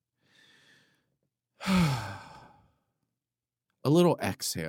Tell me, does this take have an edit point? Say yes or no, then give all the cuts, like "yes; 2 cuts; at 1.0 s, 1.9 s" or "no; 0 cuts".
no; 0 cuts